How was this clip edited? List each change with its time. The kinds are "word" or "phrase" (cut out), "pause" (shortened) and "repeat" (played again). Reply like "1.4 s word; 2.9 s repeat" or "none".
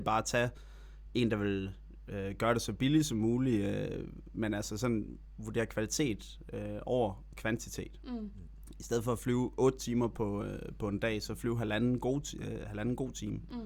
none